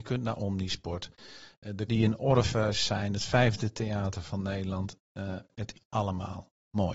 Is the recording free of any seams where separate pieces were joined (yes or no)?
no